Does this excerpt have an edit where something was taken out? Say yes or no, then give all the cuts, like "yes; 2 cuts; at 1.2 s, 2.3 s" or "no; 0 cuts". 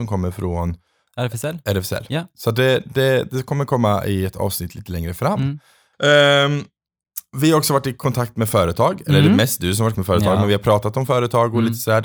yes; 1 cut; at 9.9 s